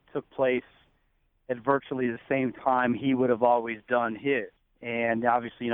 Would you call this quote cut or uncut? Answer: cut